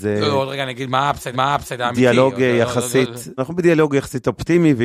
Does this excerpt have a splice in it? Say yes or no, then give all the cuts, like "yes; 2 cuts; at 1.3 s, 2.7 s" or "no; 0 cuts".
yes; 2 cuts; at 1.3 s, 3.4 s